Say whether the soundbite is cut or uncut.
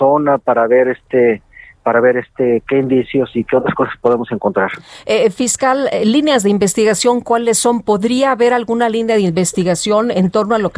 uncut